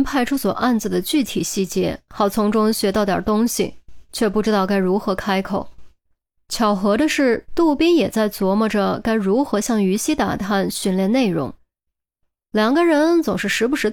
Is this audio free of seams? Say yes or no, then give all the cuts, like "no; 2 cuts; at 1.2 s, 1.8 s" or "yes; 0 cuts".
yes; 0 cuts